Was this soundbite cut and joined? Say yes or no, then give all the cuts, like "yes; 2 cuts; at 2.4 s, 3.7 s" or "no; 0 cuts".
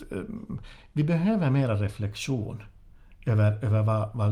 no; 0 cuts